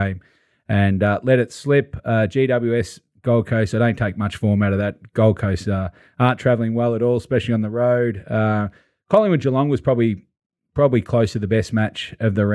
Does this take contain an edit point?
no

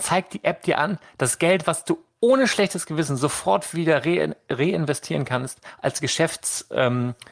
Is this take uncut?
yes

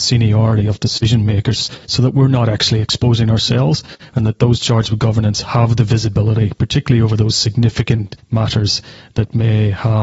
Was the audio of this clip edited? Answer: yes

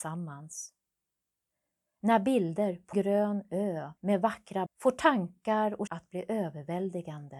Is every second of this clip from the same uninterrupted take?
no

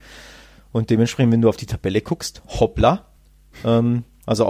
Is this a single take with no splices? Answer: yes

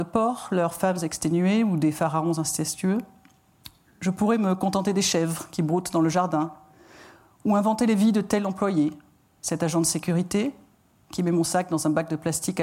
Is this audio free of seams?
yes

